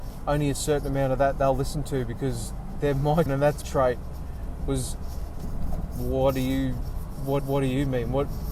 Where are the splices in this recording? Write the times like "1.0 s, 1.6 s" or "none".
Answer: 3.3 s, 3.6 s, 7.4 s

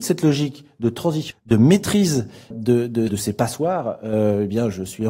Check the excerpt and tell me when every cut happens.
1.3 s, 2.5 s, 3.1 s

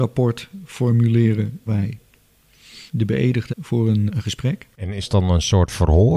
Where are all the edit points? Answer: 1.7 s, 2.9 s, 3.5 s, 4.1 s, 4.7 s, 5.1 s

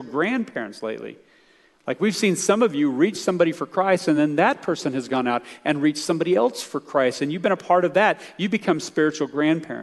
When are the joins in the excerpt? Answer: none

